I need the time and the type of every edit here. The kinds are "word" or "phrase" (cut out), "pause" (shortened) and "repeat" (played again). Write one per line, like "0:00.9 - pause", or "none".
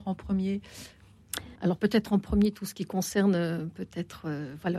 0:01.6 - pause